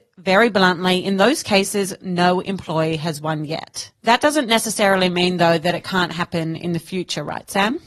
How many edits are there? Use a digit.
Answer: 1